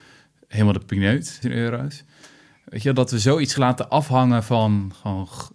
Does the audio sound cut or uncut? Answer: cut